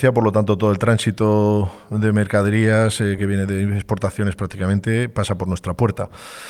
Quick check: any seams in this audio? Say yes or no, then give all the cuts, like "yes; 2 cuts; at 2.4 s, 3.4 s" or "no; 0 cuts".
no; 0 cuts